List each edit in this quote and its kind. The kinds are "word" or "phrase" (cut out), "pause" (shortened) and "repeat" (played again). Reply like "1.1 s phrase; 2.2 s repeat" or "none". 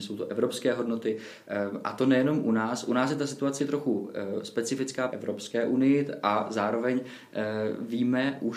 3.6 s word; 5.1 s phrase